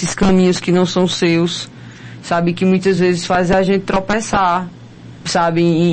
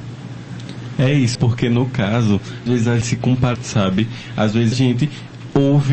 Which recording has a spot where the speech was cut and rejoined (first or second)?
second